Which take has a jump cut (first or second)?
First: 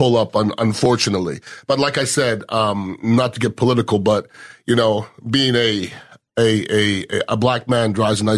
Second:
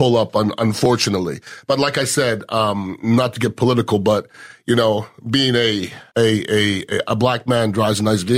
second